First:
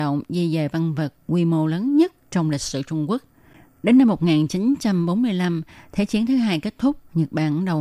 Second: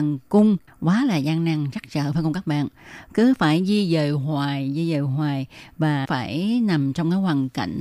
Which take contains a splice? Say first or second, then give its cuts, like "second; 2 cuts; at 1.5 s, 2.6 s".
second; 1 cut; at 6.0 s